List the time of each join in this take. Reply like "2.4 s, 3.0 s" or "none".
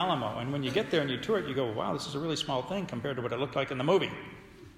none